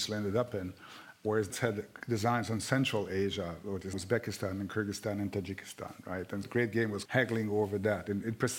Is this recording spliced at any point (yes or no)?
yes